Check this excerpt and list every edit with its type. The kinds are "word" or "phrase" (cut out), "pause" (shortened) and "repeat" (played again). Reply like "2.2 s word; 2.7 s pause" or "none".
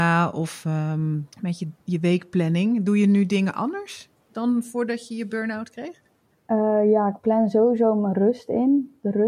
1.3 s pause; 1.8 s pause; 4.2 s pause